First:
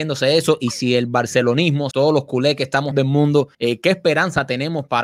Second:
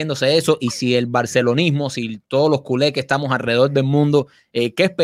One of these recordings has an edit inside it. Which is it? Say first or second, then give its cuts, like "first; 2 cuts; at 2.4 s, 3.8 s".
first; 3 cuts; at 1.9 s, 2.9 s, 3.5 s